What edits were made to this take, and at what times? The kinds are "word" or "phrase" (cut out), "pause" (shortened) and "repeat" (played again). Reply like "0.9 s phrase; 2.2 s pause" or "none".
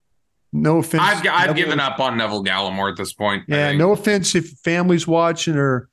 none